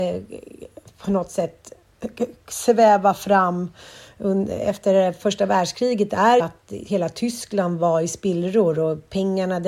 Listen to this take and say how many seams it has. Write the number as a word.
one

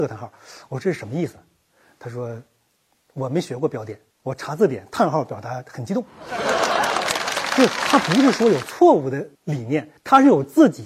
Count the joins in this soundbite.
three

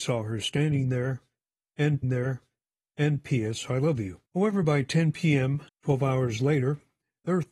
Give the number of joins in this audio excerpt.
three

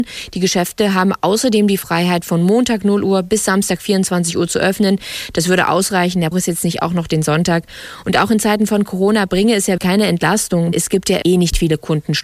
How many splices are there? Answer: four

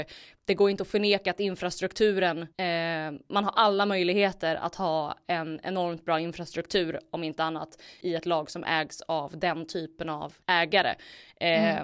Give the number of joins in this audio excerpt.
three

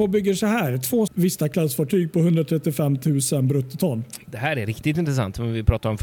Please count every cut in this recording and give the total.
one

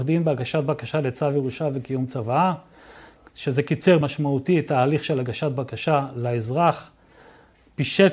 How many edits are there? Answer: one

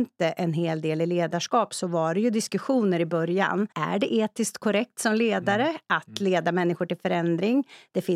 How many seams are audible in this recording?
one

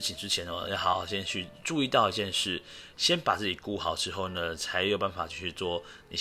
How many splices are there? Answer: zero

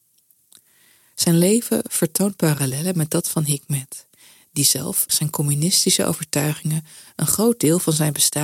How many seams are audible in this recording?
one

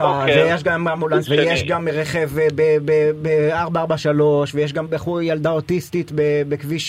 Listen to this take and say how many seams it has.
two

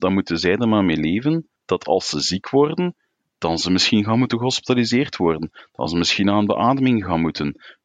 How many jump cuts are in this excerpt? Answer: one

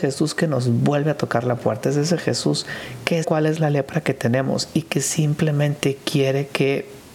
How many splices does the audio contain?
one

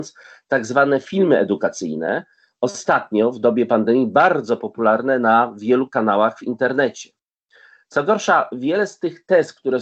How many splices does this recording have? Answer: zero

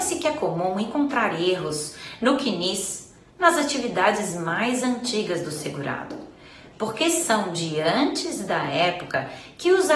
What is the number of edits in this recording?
zero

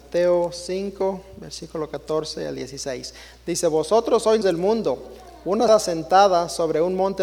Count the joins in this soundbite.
two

